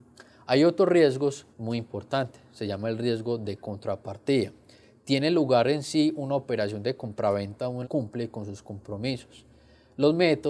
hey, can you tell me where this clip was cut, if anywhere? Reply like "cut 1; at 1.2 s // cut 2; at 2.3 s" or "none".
cut 1; at 1.5 s // cut 2; at 7.8 s